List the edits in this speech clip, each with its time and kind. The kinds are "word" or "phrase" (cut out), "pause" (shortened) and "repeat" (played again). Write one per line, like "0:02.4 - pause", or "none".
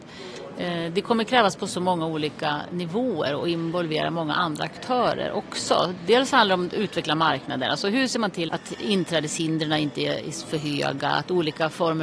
0:08.5 - word